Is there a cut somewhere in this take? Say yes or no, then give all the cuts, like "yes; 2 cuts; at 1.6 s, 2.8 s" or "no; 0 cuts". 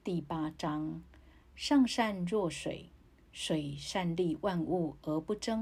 no; 0 cuts